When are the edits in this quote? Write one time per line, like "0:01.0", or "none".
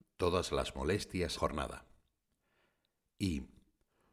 0:01.3